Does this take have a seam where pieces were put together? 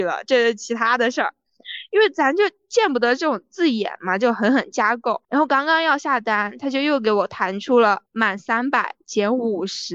yes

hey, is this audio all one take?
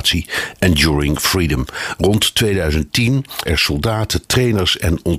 no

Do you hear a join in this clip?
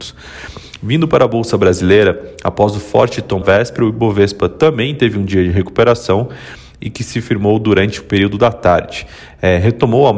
yes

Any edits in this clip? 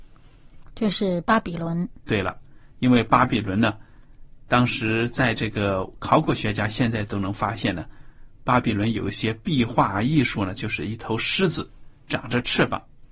no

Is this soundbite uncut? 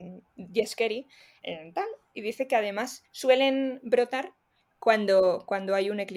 no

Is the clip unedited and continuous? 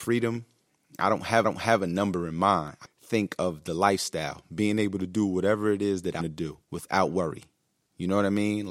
no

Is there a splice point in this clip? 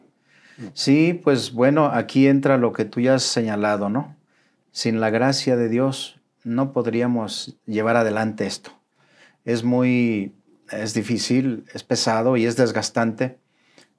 no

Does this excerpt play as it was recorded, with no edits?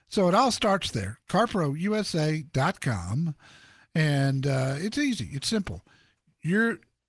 yes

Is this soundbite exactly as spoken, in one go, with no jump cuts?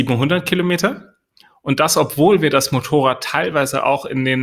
yes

